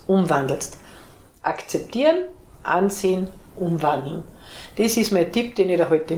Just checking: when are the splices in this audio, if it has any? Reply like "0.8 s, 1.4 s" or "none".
none